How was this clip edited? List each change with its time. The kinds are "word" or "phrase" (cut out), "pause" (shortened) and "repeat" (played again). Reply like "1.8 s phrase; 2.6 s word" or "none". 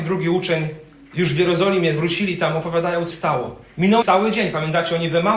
3.1 s word; 4.0 s word